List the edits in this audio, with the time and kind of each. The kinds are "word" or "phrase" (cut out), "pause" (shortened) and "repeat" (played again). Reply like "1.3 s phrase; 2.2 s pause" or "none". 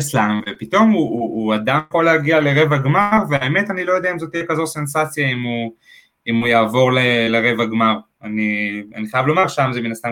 none